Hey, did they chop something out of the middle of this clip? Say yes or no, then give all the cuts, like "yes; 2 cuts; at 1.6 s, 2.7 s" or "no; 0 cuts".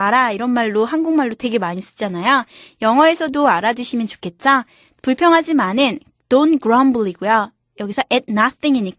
no; 0 cuts